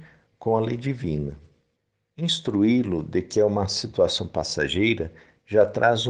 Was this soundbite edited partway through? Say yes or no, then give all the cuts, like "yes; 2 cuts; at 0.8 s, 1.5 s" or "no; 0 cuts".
yes; 1 cut; at 1.8 s